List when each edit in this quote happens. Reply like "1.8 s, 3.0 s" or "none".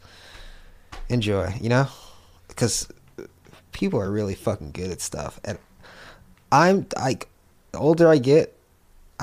none

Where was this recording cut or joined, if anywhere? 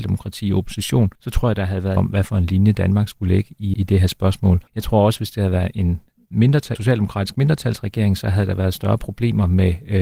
1.1 s, 2.0 s, 3.7 s, 4.7 s, 6.8 s

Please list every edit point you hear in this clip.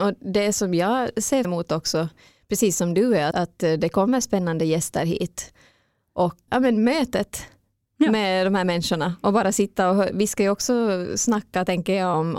1.4 s, 3.3 s, 6.5 s

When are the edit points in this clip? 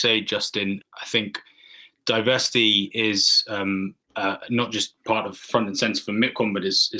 4.0 s

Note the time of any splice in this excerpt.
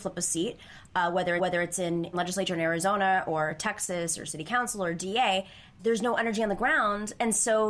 1.4 s, 2.1 s, 5.8 s

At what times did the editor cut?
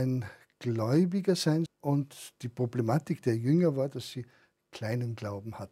1.7 s

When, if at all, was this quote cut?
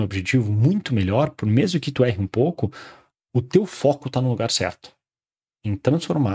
none

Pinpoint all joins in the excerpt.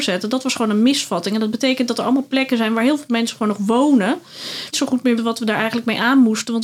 4.7 s, 5.2 s

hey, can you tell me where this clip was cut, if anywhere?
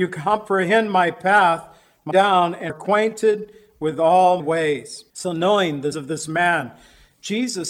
2.1 s, 2.7 s, 4.4 s, 5.1 s, 5.9 s

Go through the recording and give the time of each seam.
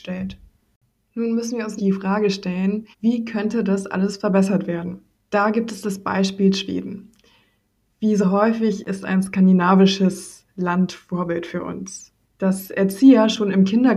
1.8 s, 2.9 s, 5.1 s, 12.2 s

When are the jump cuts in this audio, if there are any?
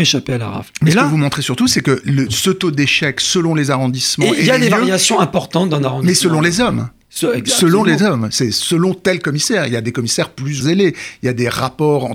10.6 s

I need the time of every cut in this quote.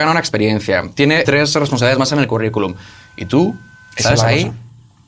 1.2 s

